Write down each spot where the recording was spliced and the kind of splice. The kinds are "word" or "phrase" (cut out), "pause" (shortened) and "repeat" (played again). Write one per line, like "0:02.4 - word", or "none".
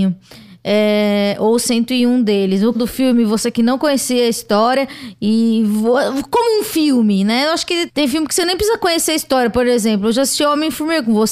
0:02.7 - phrase
0:07.9 - word